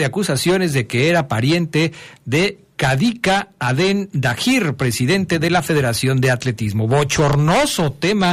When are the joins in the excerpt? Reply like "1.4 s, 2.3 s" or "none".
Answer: none